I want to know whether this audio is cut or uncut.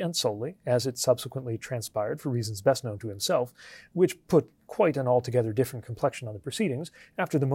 uncut